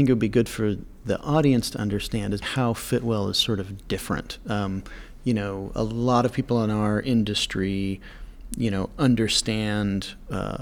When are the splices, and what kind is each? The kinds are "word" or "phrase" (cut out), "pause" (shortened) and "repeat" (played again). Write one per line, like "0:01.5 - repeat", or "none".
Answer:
0:02.4 - word